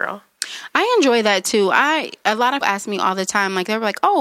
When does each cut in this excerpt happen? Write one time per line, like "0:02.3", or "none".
0:02.6

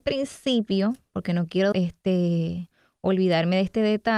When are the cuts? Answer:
0:01.7

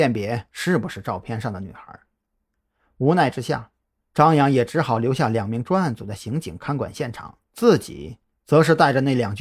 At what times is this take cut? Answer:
0:07.4

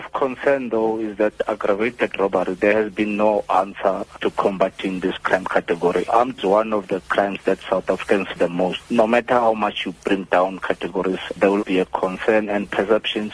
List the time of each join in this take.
0:06.4
0:08.4
0:10.6
0:11.6

